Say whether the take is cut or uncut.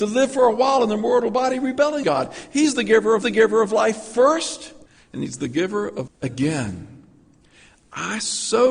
cut